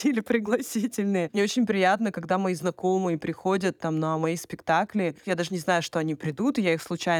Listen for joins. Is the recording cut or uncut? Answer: uncut